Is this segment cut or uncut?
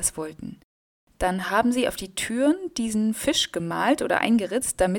uncut